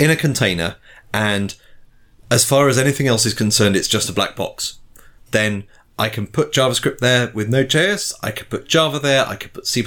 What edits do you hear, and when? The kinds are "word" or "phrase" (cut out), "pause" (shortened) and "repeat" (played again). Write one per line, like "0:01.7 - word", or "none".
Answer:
none